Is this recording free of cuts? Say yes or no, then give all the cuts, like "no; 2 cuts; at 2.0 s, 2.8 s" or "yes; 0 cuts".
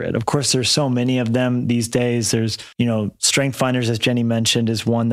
no; 1 cut; at 2.7 s